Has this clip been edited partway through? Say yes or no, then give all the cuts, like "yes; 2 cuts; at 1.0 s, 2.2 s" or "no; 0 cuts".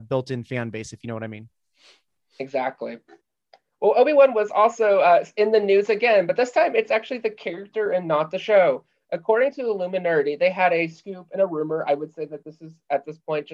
no; 0 cuts